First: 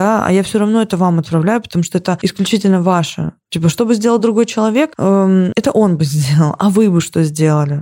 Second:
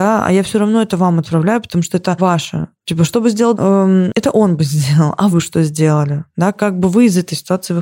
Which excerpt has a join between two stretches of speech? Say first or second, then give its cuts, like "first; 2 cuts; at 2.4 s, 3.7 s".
second; 3 cuts; at 2.2 s, 3.5 s, 5.3 s